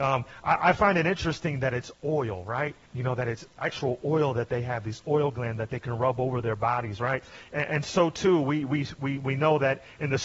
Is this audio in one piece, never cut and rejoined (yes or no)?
no